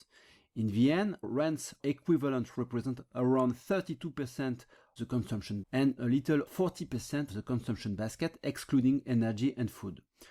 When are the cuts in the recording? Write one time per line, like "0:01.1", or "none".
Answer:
0:01.2
0:01.8
0:02.5
0:05.0
0:05.6
0:06.0
0:06.5
0:07.3